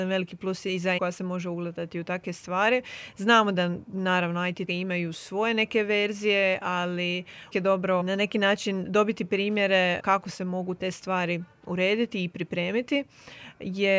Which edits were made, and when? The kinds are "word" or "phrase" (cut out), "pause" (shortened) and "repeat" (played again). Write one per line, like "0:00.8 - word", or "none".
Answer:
0:01.0 - word
0:04.7 - word
0:07.5 - word
0:08.0 - word
0:10.0 - word

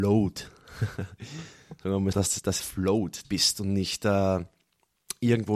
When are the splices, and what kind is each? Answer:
0:02.1 - word
0:02.6 - word
0:03.2 - phrase

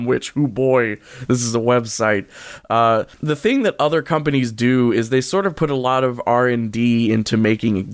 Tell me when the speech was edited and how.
0:03.1 - pause

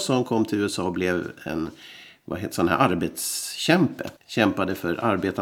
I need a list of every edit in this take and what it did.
0:04.2 - pause

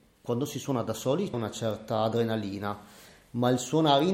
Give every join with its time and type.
0:01.3 - phrase

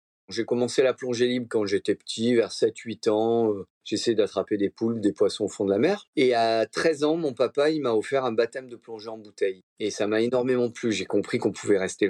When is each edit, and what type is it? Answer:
0:03.7 - pause
0:06.1 - pause
0:09.7 - pause

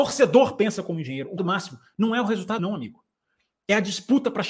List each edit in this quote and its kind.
0:01.4 - word
0:02.6 - word

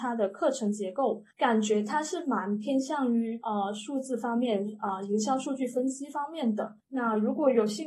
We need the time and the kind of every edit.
0:01.3 - pause
0:06.8 - pause

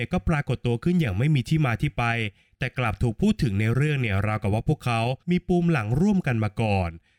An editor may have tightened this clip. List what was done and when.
0:05.2 - pause

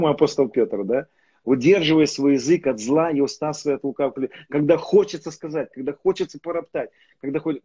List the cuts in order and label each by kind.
none

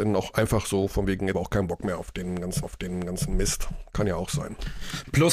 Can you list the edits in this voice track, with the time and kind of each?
0:01.3 - word
0:02.6 - repeat

